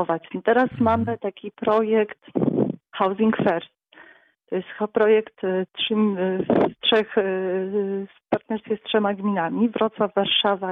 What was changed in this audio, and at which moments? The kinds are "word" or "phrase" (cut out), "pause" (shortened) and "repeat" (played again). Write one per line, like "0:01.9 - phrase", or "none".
0:02.9 - pause